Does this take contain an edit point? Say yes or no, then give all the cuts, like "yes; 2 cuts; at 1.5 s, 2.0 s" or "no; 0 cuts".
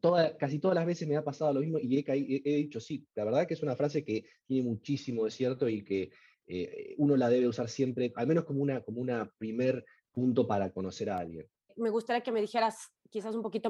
no; 0 cuts